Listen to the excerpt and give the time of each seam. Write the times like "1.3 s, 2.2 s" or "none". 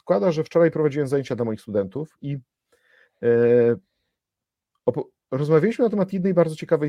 none